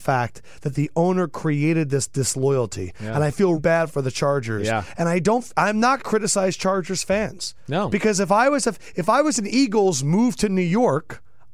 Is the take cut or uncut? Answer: cut